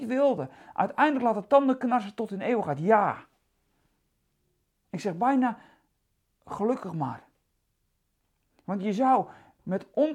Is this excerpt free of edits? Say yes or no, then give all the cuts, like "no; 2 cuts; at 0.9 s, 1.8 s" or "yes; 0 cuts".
yes; 0 cuts